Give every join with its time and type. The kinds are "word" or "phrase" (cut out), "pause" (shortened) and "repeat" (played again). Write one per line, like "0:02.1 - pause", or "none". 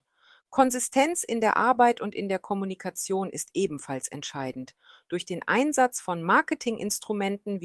none